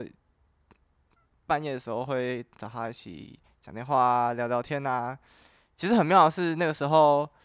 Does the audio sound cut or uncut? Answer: uncut